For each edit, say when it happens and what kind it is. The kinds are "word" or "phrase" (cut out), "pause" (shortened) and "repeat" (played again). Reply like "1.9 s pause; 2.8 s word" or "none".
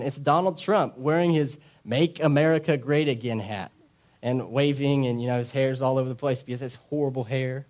none